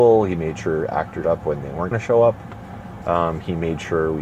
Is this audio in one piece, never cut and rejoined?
no; 2 cuts; at 1.2 s, 1.9 s

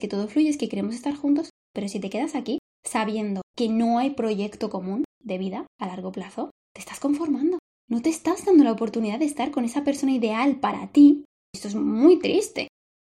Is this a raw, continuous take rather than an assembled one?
yes; 0 cuts

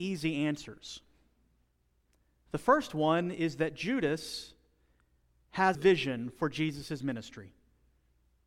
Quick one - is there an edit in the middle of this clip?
yes; 1 cut; at 5.7 s

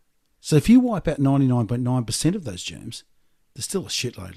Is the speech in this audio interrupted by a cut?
no; 0 cuts

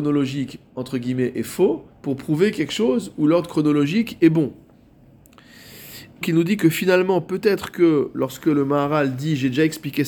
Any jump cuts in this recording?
yes; 2 cuts; at 1.9 s, 6.2 s

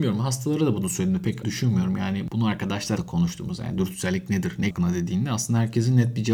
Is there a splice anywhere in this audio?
yes; 3 cuts; at 1.4 s, 3.0 s, 4.7 s

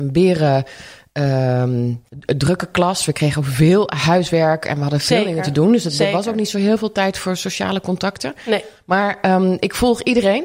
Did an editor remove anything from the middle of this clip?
yes; 1 cut; at 2.1 s

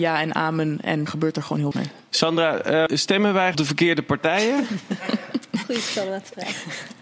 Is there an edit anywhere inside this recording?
yes; 4 cuts; at 1.1 s, 1.7 s, 2.9 s, 3.5 s

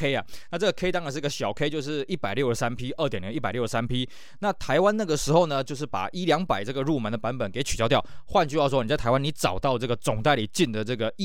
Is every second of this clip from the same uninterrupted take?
yes; 0 cuts

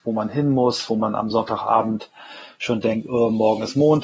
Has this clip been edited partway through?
no; 0 cuts

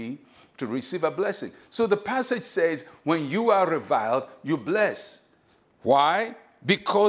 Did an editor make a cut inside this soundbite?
no; 0 cuts

